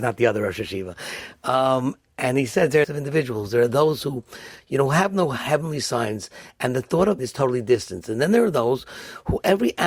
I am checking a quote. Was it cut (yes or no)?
yes